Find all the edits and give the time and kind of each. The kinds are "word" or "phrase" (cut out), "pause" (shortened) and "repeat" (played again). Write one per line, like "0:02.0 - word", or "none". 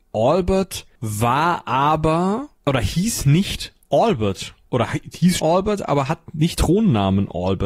0:01.0 - pause
0:02.6 - pause
0:05.4 - word
0:06.6 - word